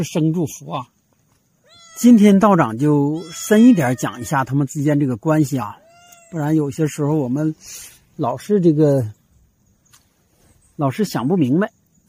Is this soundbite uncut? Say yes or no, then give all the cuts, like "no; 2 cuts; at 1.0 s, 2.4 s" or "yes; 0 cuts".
yes; 0 cuts